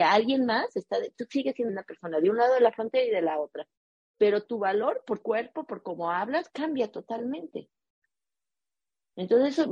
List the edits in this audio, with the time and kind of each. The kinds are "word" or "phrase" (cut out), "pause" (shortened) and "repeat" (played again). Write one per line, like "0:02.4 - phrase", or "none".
0:01.7 - word
0:05.2 - word